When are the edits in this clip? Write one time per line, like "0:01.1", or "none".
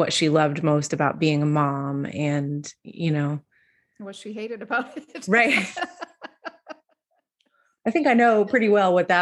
none